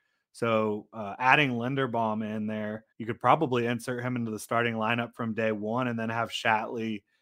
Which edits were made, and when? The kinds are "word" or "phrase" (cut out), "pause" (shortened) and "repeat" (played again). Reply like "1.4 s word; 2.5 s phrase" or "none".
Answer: 2.9 s pause